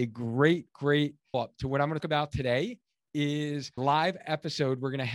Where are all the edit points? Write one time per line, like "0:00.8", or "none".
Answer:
0:01.3
0:02.0
0:03.8